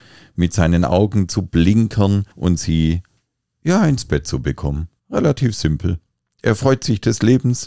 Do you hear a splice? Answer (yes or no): yes